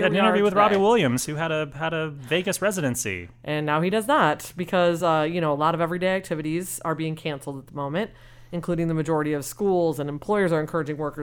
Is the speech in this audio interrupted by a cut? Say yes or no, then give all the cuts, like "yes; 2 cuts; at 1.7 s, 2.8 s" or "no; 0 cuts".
no; 0 cuts